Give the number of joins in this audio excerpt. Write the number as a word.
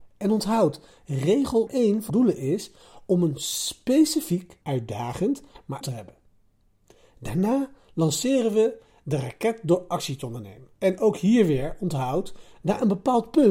five